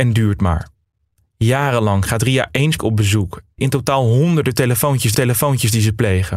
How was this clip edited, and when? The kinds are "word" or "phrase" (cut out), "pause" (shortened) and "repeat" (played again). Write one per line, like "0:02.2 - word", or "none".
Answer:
0:02.8 - phrase
0:03.6 - phrase
0:05.1 - repeat